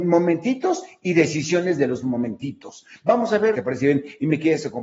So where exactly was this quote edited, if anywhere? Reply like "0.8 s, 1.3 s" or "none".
3.5 s